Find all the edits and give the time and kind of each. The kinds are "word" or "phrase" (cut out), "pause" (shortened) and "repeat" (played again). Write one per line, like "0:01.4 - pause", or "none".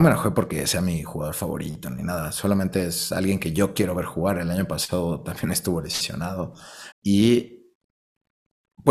0:06.9 - pause